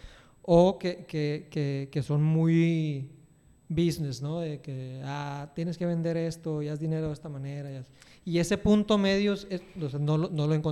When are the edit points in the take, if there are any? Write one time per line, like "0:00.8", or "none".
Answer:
none